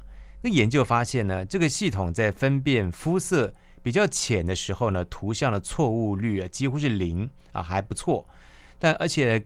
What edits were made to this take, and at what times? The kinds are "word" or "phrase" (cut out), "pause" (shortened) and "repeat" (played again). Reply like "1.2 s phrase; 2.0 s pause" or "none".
none

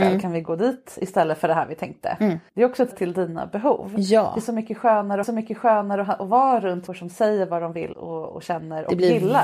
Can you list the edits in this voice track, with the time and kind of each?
2.5 s pause; 2.9 s phrase; 5.2 s repeat; 6.9 s word; 7.9 s word

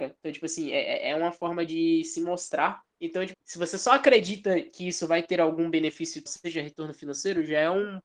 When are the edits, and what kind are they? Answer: 2.9 s pause; 3.3 s word; 6.3 s word

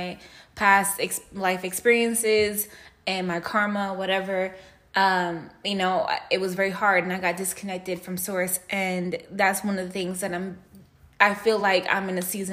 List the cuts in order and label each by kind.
none

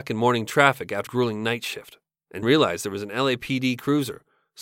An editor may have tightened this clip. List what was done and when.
1.1 s word; 2.4 s word

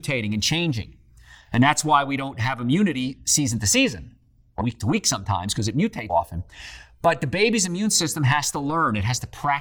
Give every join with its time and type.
4.6 s word; 6.1 s word

